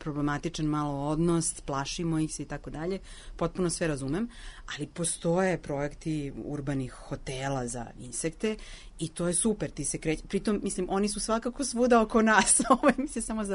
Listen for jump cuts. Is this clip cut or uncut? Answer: uncut